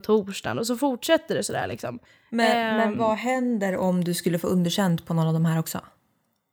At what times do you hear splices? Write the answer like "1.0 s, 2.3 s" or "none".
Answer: 2.0 s